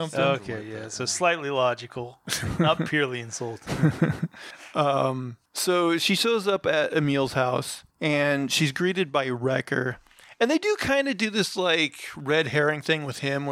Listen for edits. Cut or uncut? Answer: cut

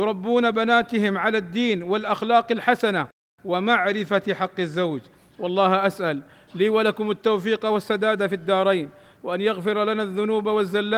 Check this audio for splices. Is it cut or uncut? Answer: uncut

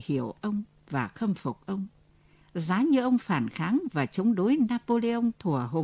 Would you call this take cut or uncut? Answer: uncut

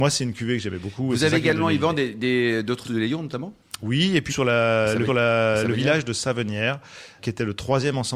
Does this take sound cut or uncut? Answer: cut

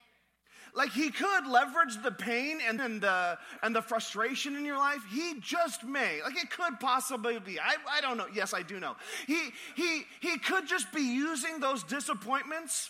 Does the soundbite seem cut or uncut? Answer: cut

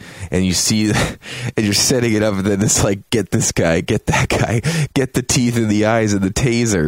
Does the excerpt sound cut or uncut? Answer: uncut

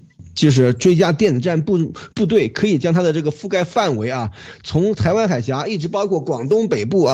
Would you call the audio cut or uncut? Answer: cut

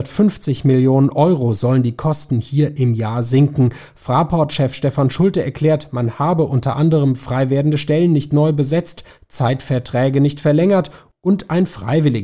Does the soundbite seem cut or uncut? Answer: uncut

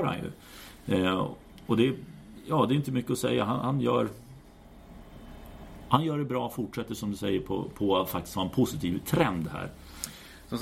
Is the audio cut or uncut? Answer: uncut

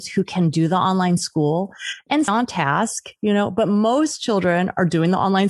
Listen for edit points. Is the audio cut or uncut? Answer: cut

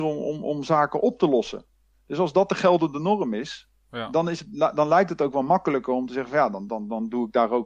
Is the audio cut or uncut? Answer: uncut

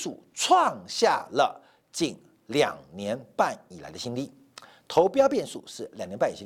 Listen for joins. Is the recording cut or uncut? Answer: uncut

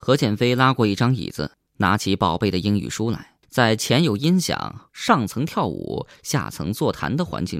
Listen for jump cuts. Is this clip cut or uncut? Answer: cut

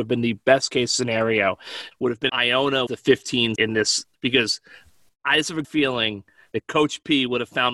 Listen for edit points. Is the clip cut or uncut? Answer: cut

